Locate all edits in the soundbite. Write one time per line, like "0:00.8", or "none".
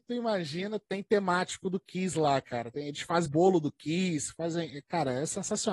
0:03.3